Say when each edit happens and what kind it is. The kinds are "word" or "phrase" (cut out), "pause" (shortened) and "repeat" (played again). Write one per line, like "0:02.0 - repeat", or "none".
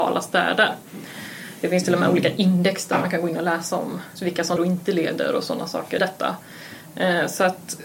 0:04.2 - word
0:04.6 - word
0:06.0 - word